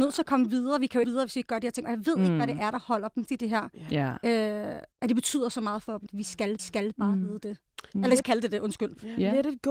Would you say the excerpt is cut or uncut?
cut